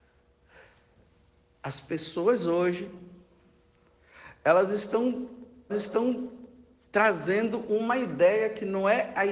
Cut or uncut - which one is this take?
cut